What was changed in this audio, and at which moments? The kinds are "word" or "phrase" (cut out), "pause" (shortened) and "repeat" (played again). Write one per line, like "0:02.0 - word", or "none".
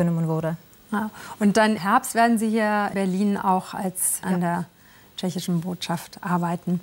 0:01.8 - word
0:02.9 - word
0:04.2 - word